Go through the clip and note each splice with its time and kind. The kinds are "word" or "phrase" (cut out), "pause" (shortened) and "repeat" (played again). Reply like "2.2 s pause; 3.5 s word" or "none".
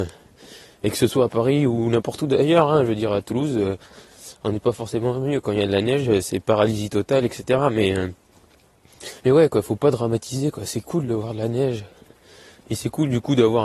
9.2 s pause